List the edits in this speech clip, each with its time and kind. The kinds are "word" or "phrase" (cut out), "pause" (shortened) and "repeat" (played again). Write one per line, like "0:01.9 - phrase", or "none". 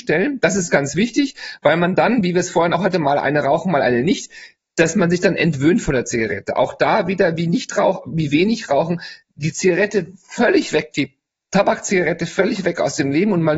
none

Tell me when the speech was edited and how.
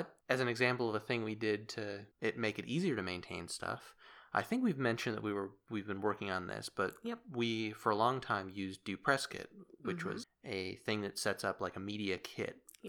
0:02.1 - word
0:10.2 - word

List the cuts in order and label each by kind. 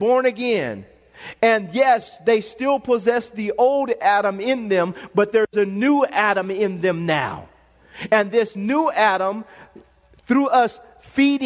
none

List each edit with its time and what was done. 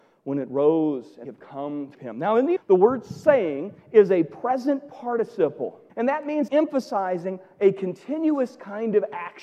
0:01.2 - word
0:01.9 - word
0:02.6 - phrase
0:05.9 - pause
0:06.5 - word

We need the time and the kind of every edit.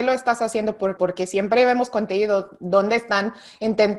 0:01.0 - phrase

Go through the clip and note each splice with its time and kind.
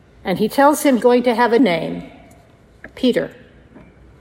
0:01.0 - word
0:01.6 - word

